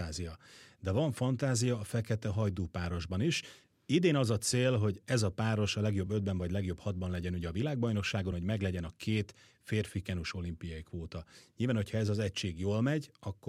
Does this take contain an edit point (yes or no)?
no